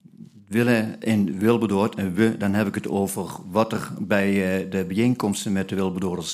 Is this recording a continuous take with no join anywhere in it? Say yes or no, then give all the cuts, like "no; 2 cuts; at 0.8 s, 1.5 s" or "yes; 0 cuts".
yes; 0 cuts